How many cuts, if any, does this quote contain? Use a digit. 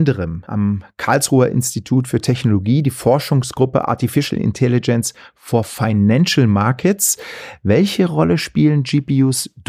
0